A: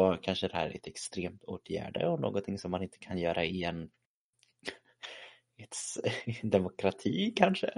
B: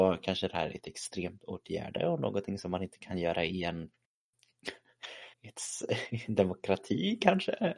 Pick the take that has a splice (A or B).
B